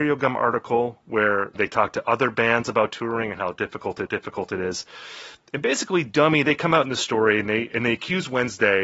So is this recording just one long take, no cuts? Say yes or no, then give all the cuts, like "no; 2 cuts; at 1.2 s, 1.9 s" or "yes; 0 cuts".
no; 2 cuts; at 1.6 s, 4.1 s